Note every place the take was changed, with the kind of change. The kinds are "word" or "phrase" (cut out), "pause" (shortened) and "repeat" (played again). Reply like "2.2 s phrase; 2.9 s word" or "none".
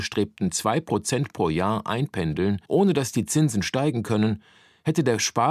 2.6 s pause